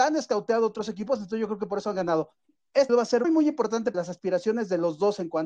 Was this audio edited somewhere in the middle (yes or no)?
yes